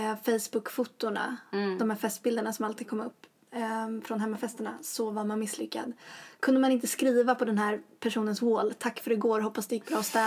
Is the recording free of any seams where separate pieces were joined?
yes; 0 cuts

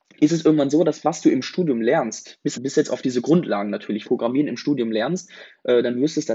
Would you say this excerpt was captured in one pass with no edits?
no; 2 cuts; at 2.5 s, 4.0 s

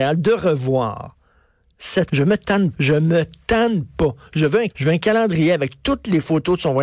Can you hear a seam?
yes; 3 cuts; at 2.1 s, 2.7 s, 4.7 s

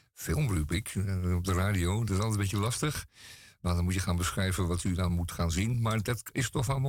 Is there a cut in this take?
no; 0 cuts

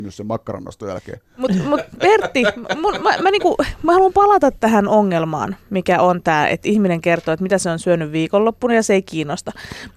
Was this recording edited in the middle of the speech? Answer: no; 0 cuts

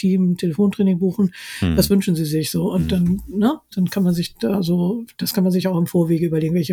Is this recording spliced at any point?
no; 0 cuts

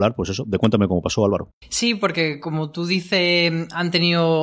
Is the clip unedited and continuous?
no; 1 cut; at 1.6 s

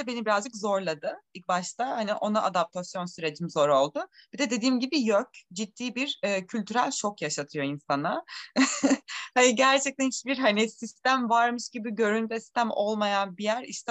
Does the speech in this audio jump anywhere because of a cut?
no; 0 cuts

